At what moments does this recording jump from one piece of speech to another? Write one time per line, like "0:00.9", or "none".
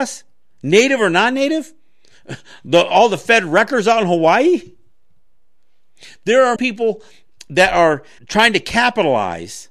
0:06.6
0:08.2